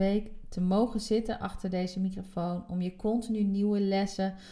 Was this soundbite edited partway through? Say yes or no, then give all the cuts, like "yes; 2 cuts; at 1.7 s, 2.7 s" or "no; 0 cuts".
no; 0 cuts